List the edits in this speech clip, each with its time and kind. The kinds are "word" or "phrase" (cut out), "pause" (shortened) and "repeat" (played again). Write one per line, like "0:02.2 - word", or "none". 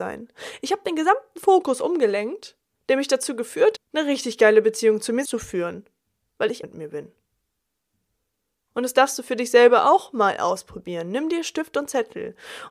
0:03.8 - word
0:05.3 - word
0:06.6 - word